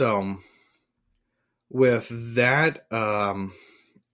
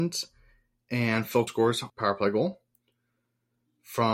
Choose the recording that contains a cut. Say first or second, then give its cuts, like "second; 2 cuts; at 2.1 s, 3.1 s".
second; 2 cuts; at 1.5 s, 1.9 s